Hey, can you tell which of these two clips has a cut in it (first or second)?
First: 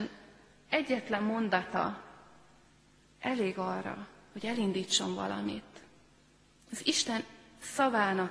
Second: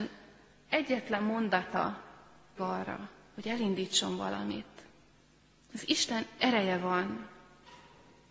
second